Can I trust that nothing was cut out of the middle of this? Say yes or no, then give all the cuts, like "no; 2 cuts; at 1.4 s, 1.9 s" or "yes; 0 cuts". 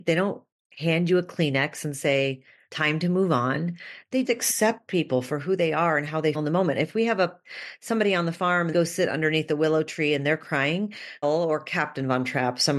no; 4 cuts; at 4.2 s, 6.3 s, 8.7 s, 11.2 s